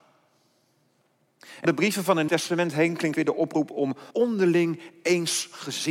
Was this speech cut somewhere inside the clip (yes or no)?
yes